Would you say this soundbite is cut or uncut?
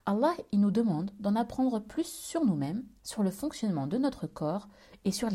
cut